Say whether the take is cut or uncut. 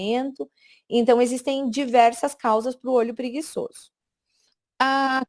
uncut